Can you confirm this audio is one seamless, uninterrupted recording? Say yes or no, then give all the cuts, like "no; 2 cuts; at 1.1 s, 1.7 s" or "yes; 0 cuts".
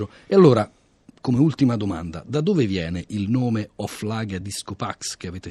yes; 0 cuts